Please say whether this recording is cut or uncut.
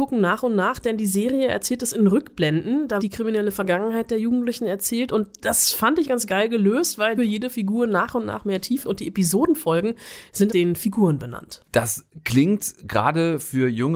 cut